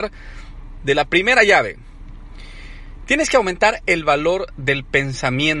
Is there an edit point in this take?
no; 0 cuts

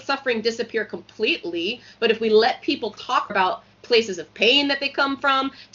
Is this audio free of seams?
no; 1 cut; at 3.3 s

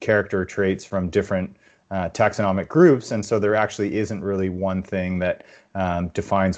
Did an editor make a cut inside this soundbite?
no; 0 cuts

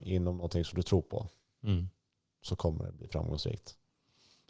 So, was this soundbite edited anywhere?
no; 0 cuts

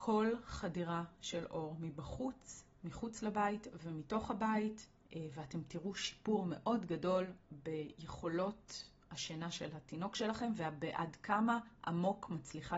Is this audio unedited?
yes; 0 cuts

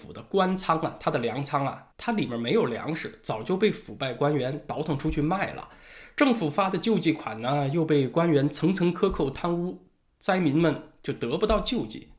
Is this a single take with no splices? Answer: no; 1 cut; at 1.9 s

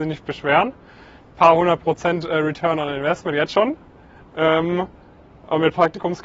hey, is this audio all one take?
yes; 0 cuts

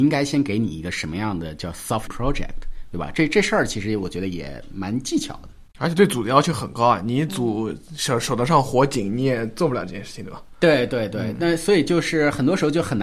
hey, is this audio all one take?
no; 2 cuts; at 2.1 s, 5.7 s

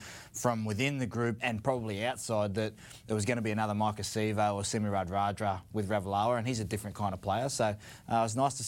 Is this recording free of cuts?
no; 1 cut; at 1.4 s

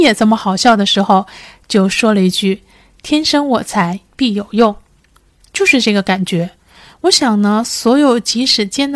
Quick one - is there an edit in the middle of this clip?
no; 0 cuts

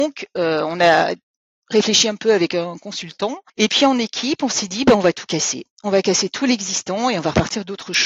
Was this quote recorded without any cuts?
no; 1 cut; at 3.5 s

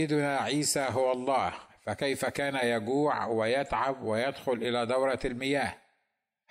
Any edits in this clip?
no; 0 cuts

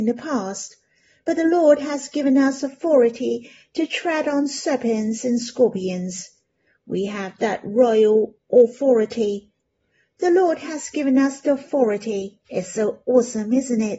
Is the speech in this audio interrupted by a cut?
yes; 1 cut; at 12.4 s

